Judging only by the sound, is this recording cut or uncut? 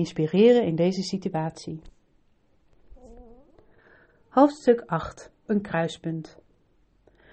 cut